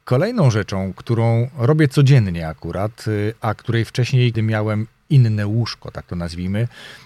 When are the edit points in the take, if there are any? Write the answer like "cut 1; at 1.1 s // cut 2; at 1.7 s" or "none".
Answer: cut 1; at 4.3 s